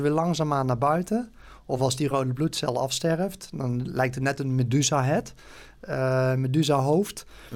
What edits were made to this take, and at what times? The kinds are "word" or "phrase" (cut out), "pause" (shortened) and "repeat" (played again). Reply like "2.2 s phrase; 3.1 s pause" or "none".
none